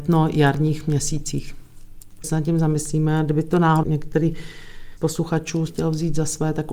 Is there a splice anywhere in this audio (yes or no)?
yes